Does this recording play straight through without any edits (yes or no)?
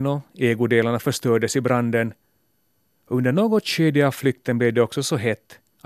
yes